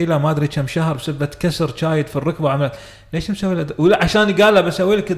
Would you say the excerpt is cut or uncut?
uncut